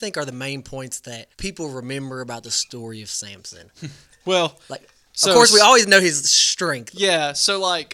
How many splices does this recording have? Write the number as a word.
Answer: one